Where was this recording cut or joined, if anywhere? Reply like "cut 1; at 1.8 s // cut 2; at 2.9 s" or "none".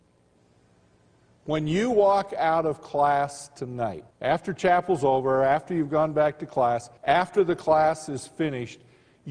cut 1; at 4.1 s // cut 2; at 7.0 s